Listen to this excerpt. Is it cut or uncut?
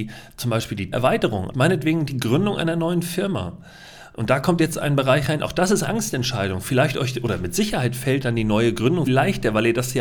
cut